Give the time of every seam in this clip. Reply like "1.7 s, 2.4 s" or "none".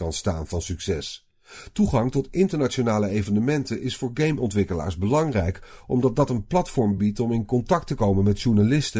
none